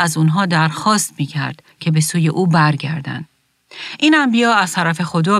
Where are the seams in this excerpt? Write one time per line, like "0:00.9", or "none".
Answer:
0:01.7